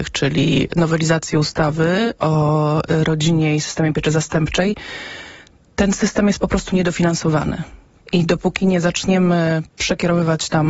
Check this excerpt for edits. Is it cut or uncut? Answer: uncut